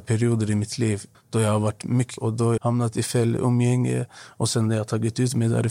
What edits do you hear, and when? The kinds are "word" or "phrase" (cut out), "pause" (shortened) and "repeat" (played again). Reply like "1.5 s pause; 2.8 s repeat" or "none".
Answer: 1.1 s word; 2.2 s word; 2.6 s word; 3.4 s word